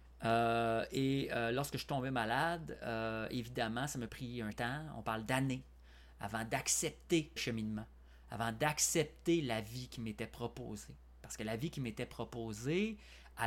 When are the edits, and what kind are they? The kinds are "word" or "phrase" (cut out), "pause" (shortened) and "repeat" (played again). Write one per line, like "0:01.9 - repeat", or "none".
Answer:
0:04.1 - word
0:04.5 - word
0:07.4 - word